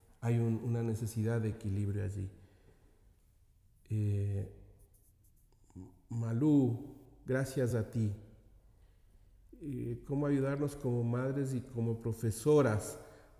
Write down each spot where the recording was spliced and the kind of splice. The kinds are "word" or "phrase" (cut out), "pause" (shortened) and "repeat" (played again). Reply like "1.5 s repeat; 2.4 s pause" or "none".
none